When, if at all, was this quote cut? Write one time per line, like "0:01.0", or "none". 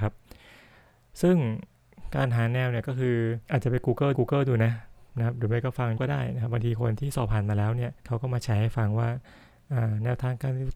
0:03.4
0:04.1
0:06.0
0:08.0